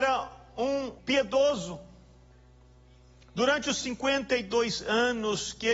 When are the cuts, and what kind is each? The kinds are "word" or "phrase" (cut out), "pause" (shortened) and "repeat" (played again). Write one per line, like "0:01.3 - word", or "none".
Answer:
0:01.0 - word